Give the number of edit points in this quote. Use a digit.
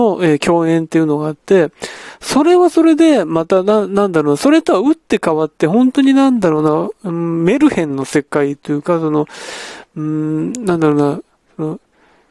0